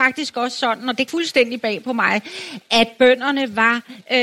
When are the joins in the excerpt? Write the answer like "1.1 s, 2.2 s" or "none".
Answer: 1.1 s